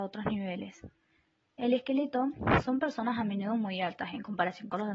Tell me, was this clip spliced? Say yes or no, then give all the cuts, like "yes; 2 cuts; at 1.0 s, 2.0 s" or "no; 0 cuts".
no; 0 cuts